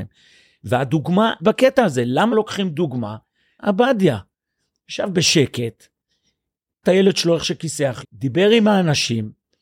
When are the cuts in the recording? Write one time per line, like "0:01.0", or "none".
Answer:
0:01.4
0:02.3
0:03.6
0:06.8
0:08.0